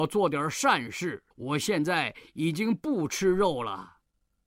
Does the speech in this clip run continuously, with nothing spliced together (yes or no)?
no